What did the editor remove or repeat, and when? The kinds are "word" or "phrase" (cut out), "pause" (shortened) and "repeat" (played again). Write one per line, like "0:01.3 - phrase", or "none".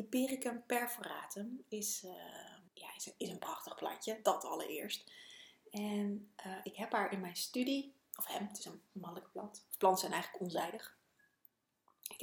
0:02.7 - pause
0:08.9 - pause